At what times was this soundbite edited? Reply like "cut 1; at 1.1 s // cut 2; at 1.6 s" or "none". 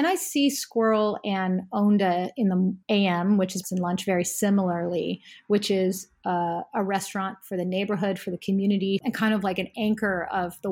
cut 1; at 2.8 s // cut 2; at 3.6 s